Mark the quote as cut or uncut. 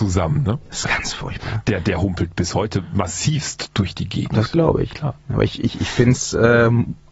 uncut